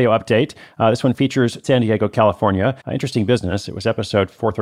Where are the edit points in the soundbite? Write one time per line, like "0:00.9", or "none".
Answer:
0:01.6
0:02.8